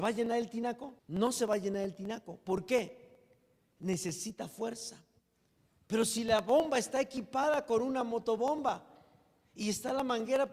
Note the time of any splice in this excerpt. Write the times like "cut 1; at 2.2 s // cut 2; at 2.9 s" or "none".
cut 1; at 1.0 s